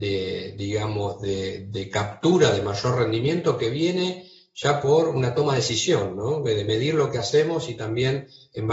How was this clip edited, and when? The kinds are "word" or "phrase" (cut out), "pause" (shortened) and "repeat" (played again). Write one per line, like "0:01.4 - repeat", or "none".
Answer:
none